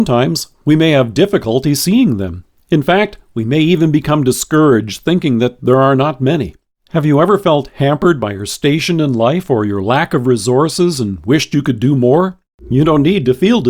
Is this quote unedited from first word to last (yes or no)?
yes